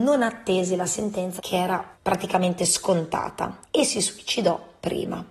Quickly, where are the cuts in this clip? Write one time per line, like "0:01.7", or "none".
0:01.4
0:01.9
0:03.6